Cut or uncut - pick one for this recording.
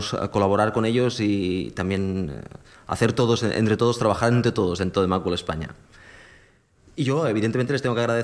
uncut